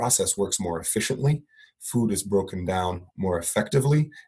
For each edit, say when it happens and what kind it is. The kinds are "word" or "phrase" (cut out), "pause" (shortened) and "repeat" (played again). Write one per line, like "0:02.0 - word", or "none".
none

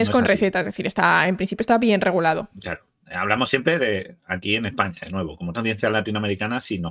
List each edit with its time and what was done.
0:02.5 - pause
0:05.5 - word

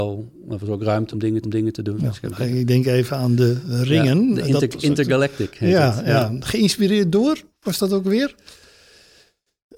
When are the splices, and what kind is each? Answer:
0:01.1 - word
0:01.4 - repeat

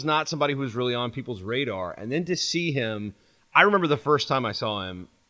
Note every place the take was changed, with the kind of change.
none

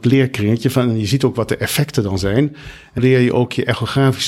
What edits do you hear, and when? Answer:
0:03.0 - word

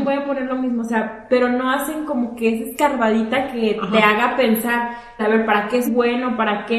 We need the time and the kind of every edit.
0:05.2 - word
0:05.8 - word

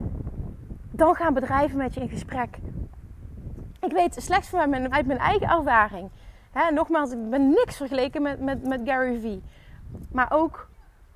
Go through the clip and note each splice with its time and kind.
0:04.9 - word

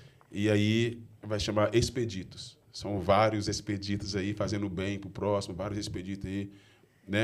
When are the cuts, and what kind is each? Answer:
0:01.2 - pause
0:02.6 - pause

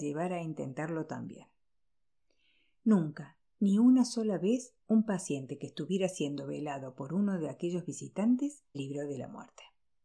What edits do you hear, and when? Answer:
0:08.7 - word

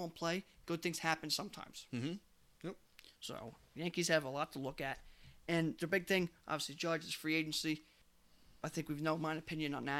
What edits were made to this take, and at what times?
none

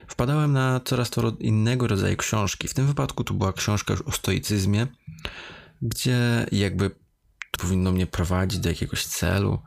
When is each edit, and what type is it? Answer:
0:07.6 - word

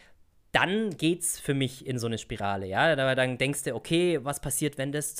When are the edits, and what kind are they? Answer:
none

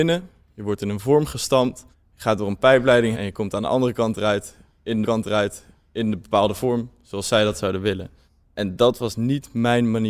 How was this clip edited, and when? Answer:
0:01.9 - pause
0:03.1 - word
0:05.0 - repeat
0:08.3 - pause

